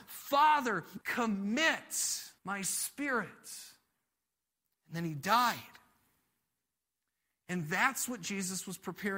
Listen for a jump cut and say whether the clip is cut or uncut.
cut